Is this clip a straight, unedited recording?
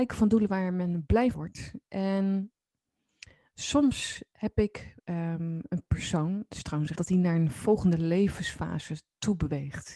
no; 3 cuts; at 1.3 s, 5.0 s, 6.9 s

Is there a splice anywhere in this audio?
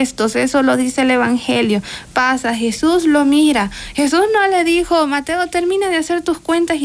no; 0 cuts

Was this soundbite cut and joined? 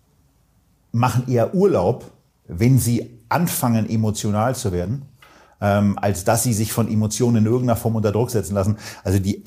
no; 0 cuts

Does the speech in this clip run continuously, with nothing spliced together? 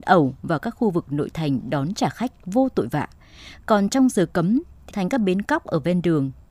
no; 1 cut; at 4.9 s

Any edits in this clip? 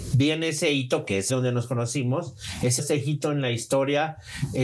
yes; 2 cuts; at 1.3 s, 2.8 s

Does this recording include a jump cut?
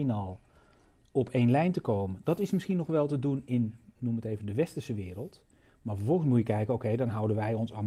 no; 0 cuts

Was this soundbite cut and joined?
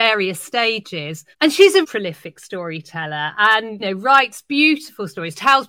yes; 3 cuts; at 1.3 s, 1.8 s, 3.8 s

